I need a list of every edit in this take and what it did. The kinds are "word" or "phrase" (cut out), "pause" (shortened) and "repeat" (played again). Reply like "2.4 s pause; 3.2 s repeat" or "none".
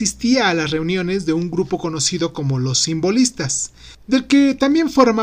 4.0 s pause